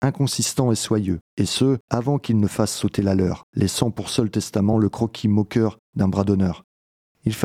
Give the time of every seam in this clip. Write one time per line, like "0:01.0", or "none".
none